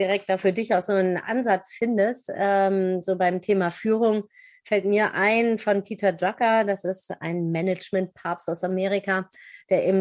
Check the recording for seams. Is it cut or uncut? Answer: uncut